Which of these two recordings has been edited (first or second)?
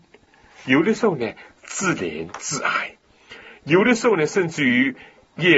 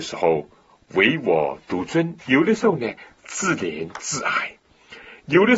second